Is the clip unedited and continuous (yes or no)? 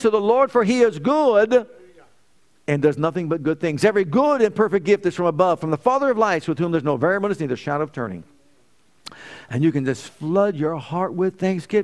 yes